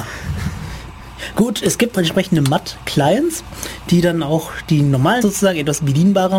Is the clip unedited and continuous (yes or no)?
no